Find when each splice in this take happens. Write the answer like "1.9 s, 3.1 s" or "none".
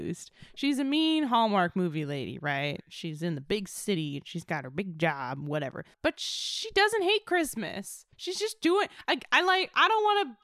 8.1 s